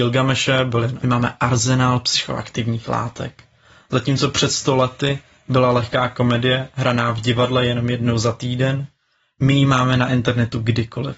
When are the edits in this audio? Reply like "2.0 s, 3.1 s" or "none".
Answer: 1.0 s